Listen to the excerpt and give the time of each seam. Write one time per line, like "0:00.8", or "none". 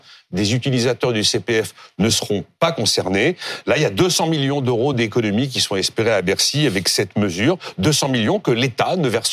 none